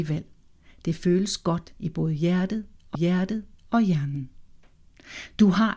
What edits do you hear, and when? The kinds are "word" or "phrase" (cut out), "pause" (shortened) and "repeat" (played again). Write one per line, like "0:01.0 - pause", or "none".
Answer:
0:02.9 - repeat